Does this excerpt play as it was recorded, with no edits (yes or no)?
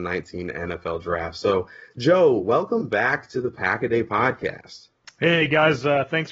yes